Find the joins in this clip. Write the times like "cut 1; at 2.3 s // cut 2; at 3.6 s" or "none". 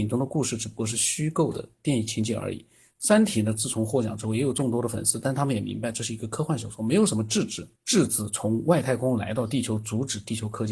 cut 1; at 7.8 s